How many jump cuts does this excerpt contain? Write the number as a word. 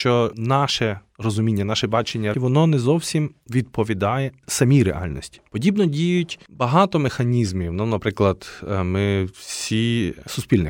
one